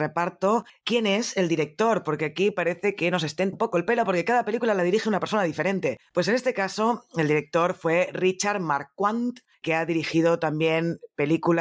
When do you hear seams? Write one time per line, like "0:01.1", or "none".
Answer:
0:03.5